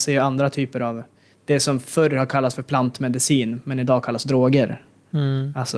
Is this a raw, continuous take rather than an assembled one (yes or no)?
yes